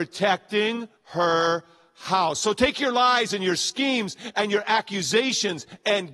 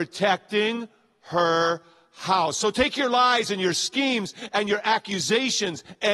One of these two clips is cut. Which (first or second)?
first